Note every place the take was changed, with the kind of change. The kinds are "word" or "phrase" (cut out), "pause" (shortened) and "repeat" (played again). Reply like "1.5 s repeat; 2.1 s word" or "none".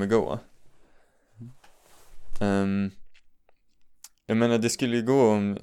none